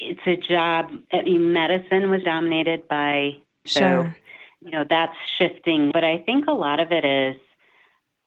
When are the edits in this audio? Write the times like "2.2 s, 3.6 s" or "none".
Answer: 2.2 s, 3.7 s, 5.9 s